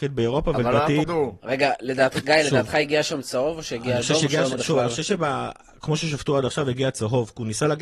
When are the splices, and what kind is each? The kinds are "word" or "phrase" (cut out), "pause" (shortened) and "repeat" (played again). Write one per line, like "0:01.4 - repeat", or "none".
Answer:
0:01.0 - phrase
0:04.6 - word

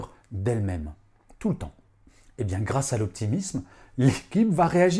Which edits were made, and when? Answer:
none

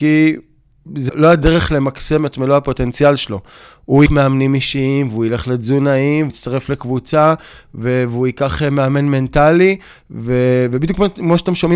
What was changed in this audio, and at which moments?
0:01.1 - word
0:04.1 - word
0:06.3 - word

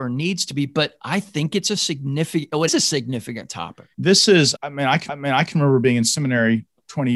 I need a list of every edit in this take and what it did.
0:02.7 - word
0:03.9 - pause
0:04.5 - word
0:05.1 - repeat

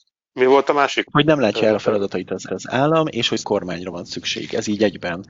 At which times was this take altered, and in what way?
0:02.5 - repeat
0:03.4 - word

